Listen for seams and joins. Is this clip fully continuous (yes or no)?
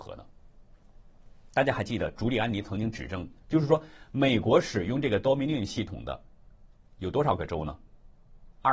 yes